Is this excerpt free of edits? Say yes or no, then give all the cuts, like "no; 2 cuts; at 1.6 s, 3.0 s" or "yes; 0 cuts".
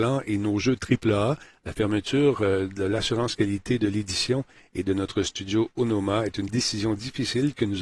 yes; 0 cuts